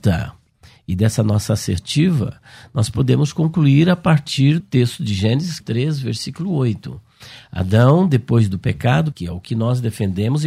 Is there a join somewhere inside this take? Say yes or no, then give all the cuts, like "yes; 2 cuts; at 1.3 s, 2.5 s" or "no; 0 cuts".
yes; 3 cuts; at 4.6 s, 5.6 s, 9.1 s